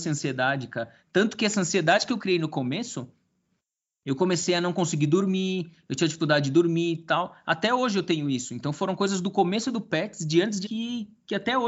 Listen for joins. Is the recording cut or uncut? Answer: cut